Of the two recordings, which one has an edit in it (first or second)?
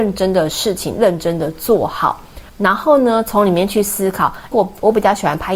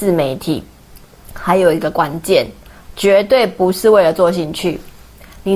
first